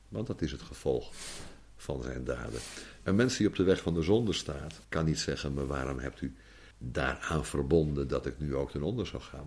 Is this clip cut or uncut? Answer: cut